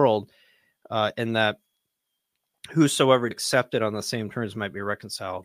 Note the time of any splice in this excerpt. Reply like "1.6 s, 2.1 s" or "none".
3.3 s